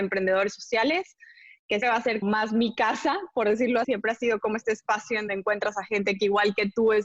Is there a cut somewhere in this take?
yes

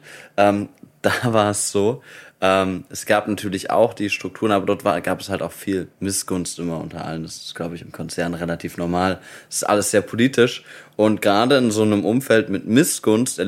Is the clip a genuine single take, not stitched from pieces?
yes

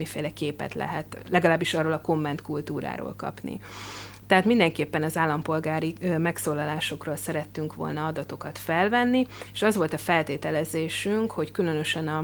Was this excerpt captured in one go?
yes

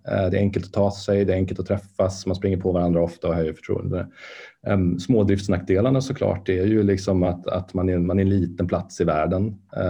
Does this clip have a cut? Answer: no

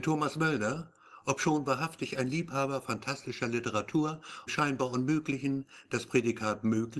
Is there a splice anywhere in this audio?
yes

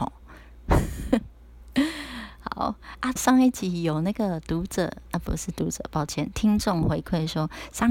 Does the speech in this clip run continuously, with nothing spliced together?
no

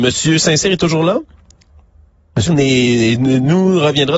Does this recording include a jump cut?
yes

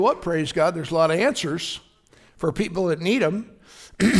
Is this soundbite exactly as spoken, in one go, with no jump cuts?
yes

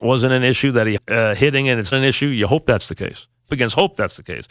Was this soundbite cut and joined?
yes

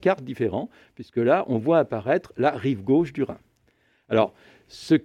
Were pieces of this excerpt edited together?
no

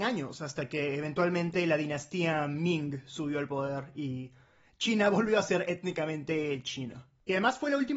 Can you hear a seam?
no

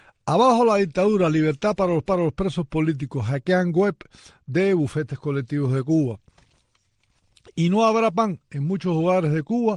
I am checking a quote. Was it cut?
yes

